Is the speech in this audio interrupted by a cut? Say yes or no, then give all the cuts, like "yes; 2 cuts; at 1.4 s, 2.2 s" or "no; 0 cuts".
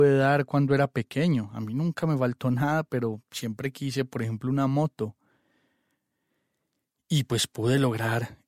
no; 0 cuts